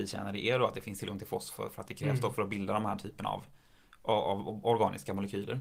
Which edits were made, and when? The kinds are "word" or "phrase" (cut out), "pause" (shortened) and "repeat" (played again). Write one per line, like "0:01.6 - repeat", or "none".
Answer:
none